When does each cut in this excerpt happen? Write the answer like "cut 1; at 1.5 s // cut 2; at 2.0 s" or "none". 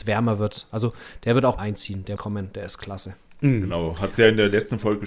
cut 1; at 1.6 s // cut 2; at 2.2 s